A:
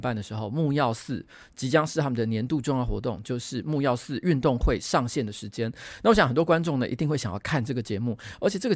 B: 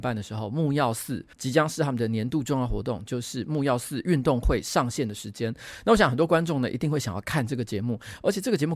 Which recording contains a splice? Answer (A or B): B